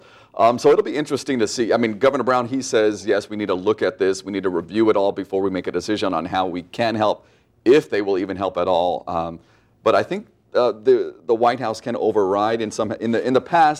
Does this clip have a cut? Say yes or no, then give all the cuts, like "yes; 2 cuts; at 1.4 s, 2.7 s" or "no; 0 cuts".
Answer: no; 0 cuts